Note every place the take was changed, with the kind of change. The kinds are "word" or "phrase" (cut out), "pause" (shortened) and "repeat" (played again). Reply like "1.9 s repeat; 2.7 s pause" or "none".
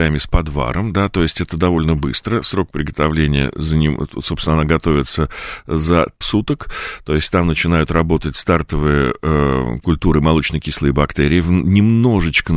1.5 s word; 6.2 s word